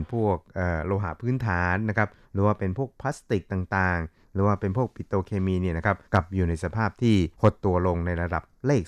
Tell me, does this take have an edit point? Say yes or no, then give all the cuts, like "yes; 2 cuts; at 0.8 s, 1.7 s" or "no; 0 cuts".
yes; 2 cuts; at 6.0 s, 7.3 s